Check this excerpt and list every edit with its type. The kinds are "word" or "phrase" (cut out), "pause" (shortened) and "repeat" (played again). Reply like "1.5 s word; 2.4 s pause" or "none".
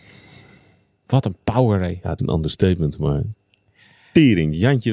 2.2 s word